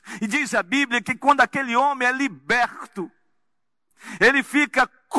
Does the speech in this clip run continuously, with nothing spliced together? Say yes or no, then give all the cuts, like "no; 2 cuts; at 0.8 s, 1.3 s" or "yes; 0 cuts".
yes; 0 cuts